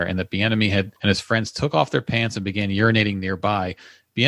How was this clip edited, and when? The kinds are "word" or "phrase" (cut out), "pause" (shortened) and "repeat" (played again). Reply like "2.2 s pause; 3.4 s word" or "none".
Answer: 1.0 s pause